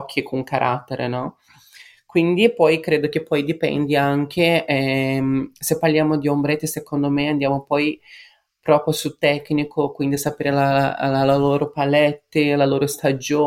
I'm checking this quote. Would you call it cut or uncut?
uncut